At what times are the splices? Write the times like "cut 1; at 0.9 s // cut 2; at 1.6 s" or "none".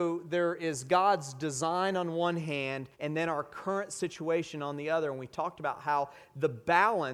cut 1; at 2.9 s